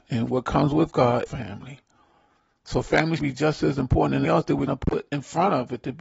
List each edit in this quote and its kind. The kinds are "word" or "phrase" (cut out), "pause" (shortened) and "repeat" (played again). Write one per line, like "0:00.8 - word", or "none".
0:01.3 - word
0:03.2 - word
0:04.2 - word
0:04.7 - word